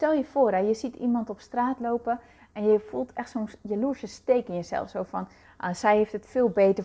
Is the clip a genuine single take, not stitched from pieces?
yes; 0 cuts

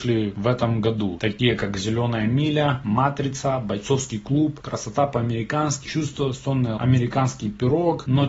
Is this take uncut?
no; 2 cuts; at 5.9 s, 6.8 s

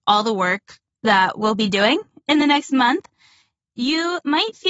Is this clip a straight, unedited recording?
yes; 0 cuts

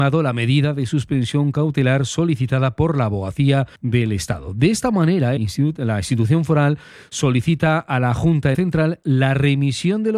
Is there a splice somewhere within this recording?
yes; 3 cuts; at 3.8 s, 5.4 s, 8.5 s

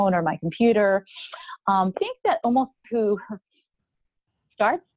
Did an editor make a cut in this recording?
yes; 2 cuts; at 1.9 s, 2.8 s

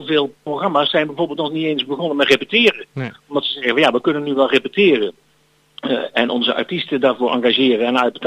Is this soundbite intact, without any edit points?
yes; 0 cuts

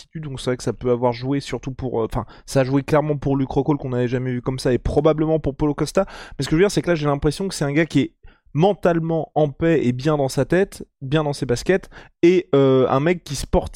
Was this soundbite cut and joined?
no; 0 cuts

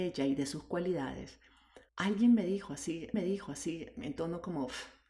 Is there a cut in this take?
yes; 2 cuts; at 1.9 s, 3.1 s

